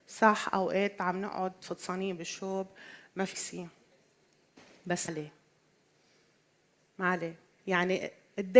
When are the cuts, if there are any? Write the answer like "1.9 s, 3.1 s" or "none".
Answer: 3.3 s, 5.1 s

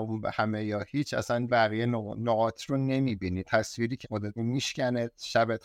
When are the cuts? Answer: 1.5 s, 2.6 s, 3.4 s, 4.0 s, 4.4 s

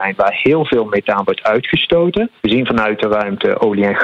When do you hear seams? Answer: 2.4 s

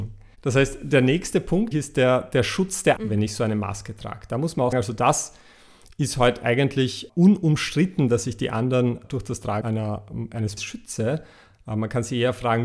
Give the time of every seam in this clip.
1.7 s, 3.0 s, 4.7 s, 7.1 s, 9.0 s, 9.6 s, 10.6 s

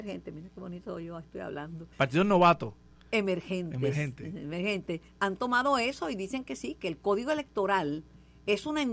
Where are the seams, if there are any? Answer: 1.9 s, 5.1 s

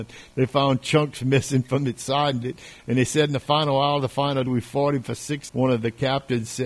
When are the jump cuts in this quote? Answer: 2.4 s, 4.5 s, 5.5 s

